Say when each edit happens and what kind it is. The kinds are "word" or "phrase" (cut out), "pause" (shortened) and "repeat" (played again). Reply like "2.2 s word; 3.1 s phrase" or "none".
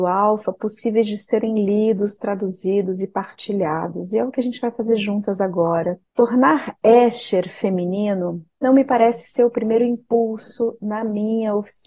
6.1 s pause; 8.5 s pause